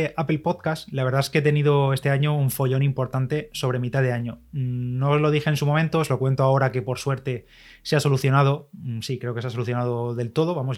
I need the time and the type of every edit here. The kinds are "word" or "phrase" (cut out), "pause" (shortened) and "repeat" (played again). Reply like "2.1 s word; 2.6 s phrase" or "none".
none